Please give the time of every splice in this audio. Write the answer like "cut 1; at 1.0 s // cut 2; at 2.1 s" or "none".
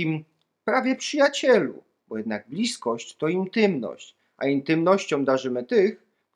none